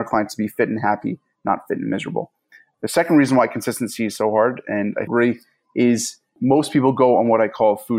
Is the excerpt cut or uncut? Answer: cut